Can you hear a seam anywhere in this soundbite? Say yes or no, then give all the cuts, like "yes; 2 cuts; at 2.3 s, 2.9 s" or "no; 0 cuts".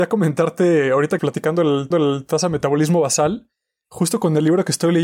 yes; 2 cuts; at 1.2 s, 1.9 s